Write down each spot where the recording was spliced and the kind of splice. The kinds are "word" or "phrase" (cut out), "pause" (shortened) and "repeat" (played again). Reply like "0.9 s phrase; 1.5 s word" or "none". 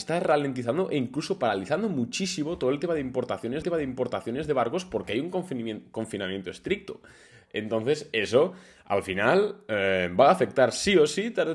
3.6 s repeat